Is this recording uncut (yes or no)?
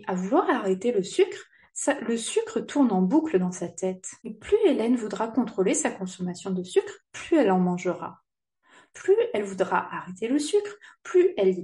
no